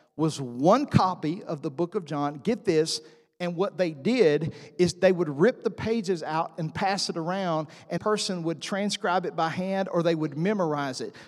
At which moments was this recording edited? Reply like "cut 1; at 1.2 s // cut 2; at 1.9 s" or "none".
cut 1; at 8.0 s